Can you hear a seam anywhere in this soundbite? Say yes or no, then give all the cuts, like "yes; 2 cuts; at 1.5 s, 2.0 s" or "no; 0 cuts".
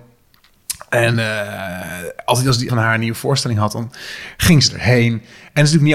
yes; 1 cut; at 2.7 s